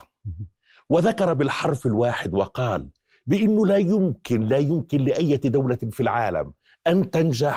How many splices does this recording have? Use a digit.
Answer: 0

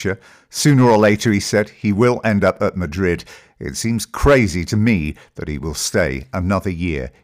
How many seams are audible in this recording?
0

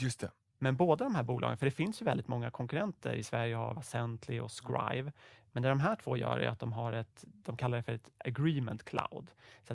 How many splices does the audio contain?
1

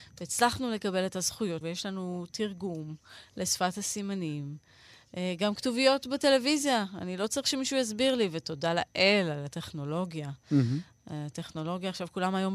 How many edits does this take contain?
1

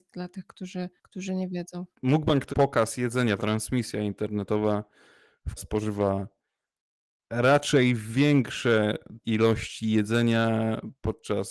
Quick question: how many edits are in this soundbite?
6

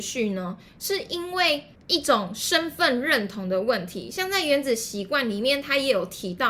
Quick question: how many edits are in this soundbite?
1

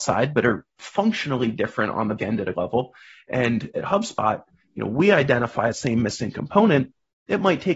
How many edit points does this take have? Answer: 4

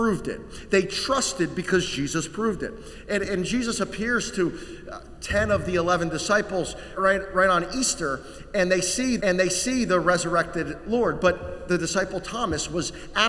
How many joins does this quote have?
2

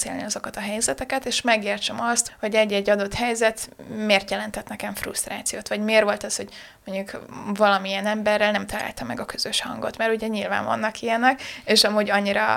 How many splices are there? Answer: 1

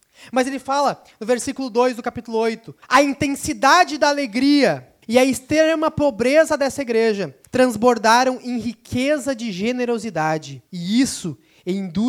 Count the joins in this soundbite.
4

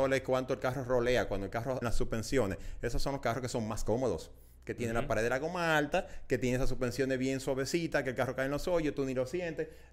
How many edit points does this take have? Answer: 1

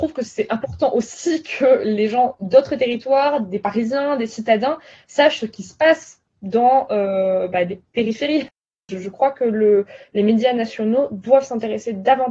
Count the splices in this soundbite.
0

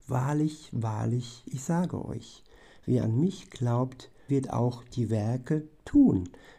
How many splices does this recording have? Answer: 1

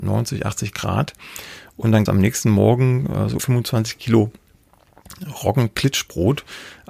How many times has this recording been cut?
2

